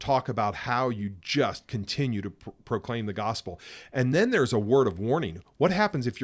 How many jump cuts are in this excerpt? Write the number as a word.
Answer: zero